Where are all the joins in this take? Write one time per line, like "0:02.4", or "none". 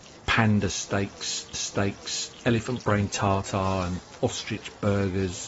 0:01.5